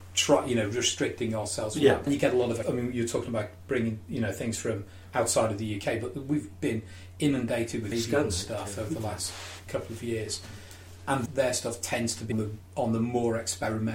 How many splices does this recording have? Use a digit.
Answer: 6